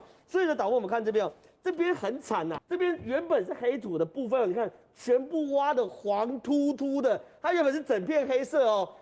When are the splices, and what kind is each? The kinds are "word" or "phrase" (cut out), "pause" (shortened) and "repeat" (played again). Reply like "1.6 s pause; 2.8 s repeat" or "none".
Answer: 2.6 s word